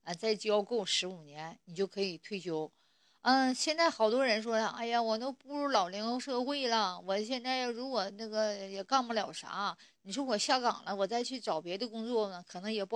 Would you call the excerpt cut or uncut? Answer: uncut